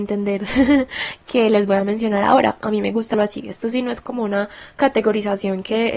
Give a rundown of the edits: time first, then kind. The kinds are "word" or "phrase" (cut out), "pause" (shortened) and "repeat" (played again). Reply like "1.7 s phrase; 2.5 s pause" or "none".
3.1 s word